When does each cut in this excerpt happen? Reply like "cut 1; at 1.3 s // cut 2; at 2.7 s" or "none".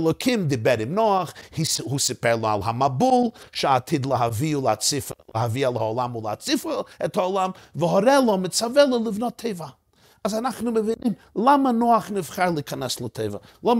none

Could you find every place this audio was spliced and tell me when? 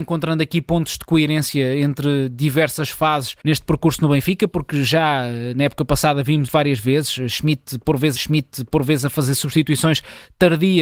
cut 1; at 3.4 s // cut 2; at 6.5 s // cut 3; at 8.2 s

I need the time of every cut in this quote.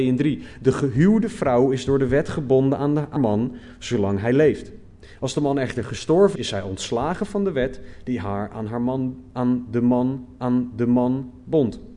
cut 1; at 3.2 s // cut 2; at 6.4 s // cut 3; at 10.4 s

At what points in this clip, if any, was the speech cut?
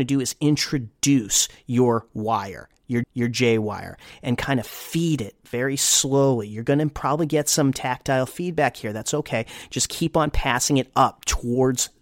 cut 1; at 3.0 s

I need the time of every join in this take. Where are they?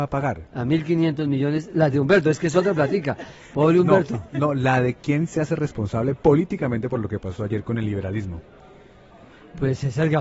none

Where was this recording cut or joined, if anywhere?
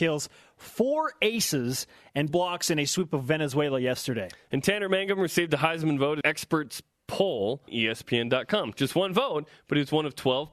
cut 1; at 2.3 s // cut 2; at 6.2 s // cut 3; at 7.7 s

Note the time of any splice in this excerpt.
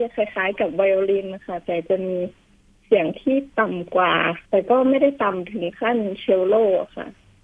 cut 1; at 4.5 s

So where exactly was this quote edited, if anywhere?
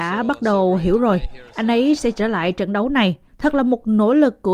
cut 1; at 3.3 s

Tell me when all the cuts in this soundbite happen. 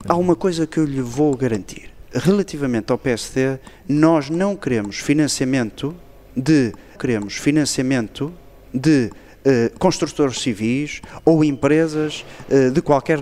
cut 1; at 7.0 s

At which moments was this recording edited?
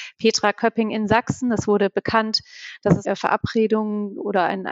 cut 1; at 3.0 s

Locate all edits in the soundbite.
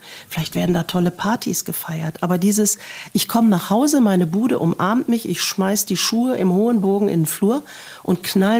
none

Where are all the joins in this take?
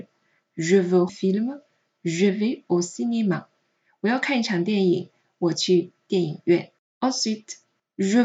cut 1; at 1.1 s

